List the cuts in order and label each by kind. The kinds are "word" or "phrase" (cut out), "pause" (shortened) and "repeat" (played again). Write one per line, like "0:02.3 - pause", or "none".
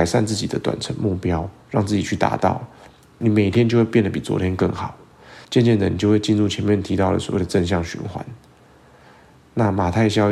0:01.6 - pause
0:05.4 - pause